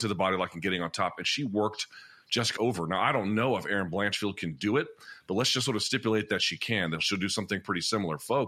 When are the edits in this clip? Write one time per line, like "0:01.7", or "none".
0:02.6